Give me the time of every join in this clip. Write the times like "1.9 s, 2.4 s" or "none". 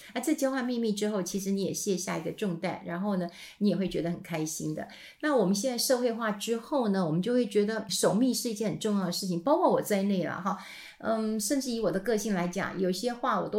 7.9 s